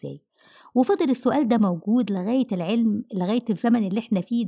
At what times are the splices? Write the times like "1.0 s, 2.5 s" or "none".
none